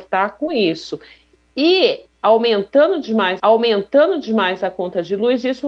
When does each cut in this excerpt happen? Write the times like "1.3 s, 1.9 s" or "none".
3.4 s

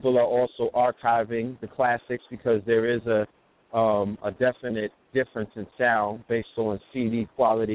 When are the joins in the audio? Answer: none

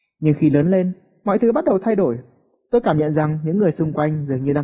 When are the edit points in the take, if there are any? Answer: none

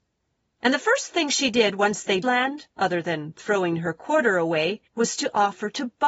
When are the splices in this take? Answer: 2.2 s, 2.7 s, 4.9 s

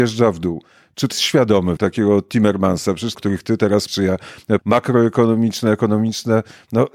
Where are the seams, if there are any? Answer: 1.1 s, 1.8 s, 3.1 s, 3.9 s, 4.6 s

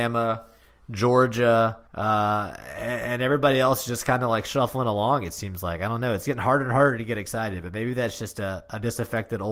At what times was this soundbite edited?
1.9 s

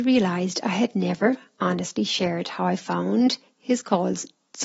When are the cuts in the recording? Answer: none

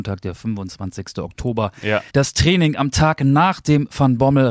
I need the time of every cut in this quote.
2.1 s

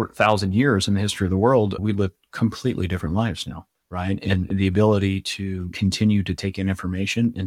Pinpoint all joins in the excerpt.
3.8 s

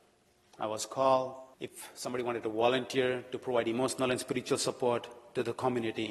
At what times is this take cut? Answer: 1.5 s

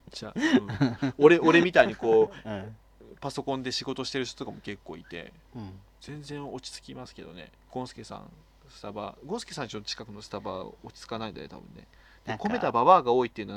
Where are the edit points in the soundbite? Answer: none

